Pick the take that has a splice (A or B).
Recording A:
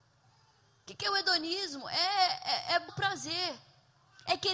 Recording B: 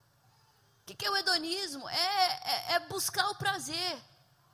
A